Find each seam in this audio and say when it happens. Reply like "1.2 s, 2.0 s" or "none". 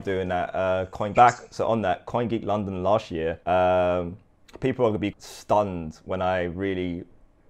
1.1 s, 3.4 s, 5.1 s